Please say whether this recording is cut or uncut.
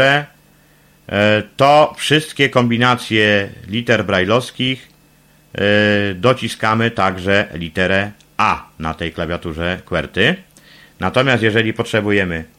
uncut